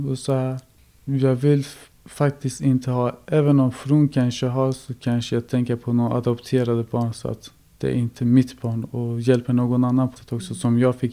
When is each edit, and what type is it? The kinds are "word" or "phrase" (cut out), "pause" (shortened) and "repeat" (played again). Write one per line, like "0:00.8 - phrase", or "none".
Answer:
0:10.2 - word